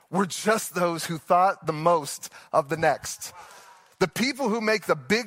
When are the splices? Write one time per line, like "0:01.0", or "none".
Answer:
none